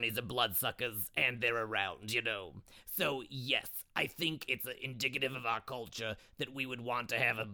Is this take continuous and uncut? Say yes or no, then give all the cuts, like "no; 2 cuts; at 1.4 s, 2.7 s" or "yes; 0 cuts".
yes; 0 cuts